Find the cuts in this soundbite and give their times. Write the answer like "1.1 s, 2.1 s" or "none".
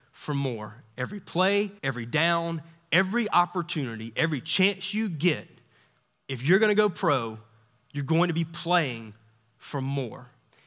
1.8 s